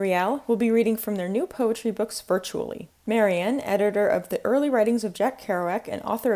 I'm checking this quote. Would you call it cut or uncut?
uncut